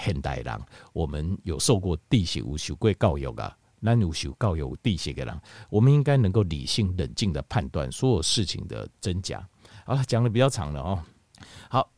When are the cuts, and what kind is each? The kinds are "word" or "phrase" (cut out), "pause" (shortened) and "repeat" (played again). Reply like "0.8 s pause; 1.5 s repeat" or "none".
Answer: 2.0 s pause